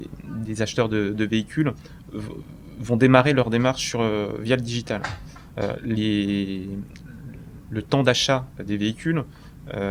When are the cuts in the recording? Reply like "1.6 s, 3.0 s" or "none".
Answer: none